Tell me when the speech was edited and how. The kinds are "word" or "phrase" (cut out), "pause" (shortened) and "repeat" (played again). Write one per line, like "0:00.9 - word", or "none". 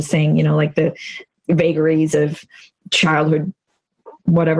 none